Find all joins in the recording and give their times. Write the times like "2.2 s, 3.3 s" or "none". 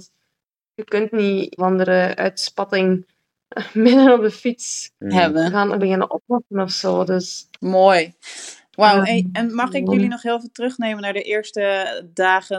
1.6 s, 5.0 s, 5.8 s